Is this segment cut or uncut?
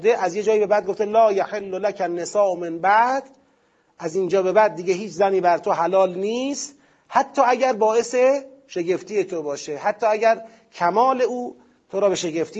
uncut